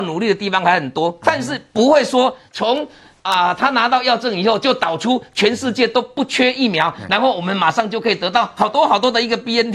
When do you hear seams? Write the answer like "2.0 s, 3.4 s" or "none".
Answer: none